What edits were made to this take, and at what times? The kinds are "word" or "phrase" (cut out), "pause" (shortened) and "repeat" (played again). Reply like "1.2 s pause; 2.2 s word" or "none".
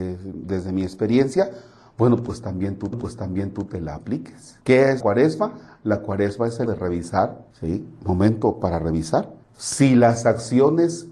2.9 s repeat; 4.6 s pause; 5.0 s word; 6.7 s word; 7.5 s pause; 9.4 s pause

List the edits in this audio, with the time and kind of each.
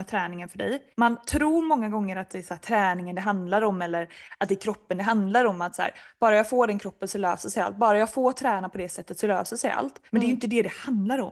0.9 s pause; 10.1 s pause

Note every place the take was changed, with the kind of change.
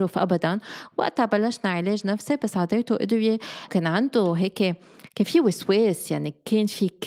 3.7 s word

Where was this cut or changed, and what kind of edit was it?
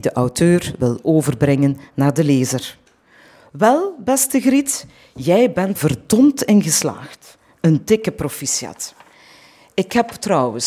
5.8 s word

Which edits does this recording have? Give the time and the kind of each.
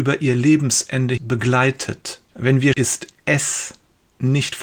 1.2 s word; 2.3 s pause; 2.7 s word

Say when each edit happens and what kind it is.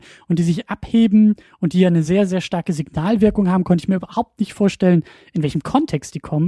none

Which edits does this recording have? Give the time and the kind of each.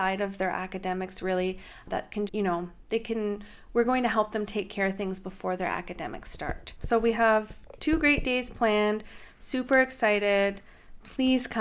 2.3 s word

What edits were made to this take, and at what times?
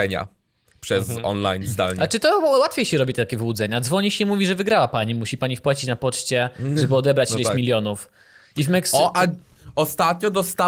none

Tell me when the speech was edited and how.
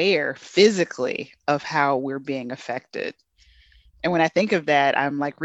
none

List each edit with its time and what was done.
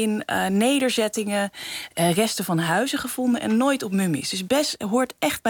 none

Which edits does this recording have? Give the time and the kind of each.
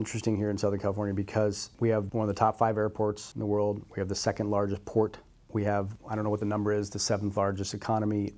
none

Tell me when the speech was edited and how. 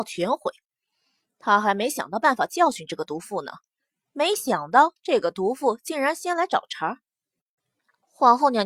none

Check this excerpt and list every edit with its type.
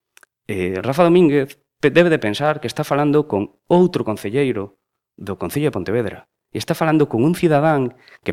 none

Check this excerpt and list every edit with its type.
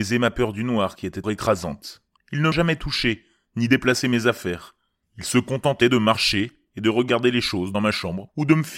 1.2 s word; 2.5 s word

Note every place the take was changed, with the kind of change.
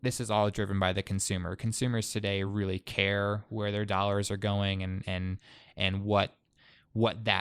none

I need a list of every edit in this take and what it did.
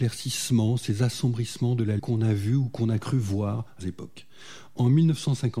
2.0 s word; 3.8 s word

